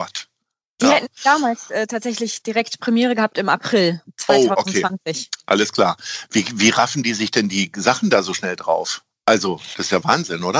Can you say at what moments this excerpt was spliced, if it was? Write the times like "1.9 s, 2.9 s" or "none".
none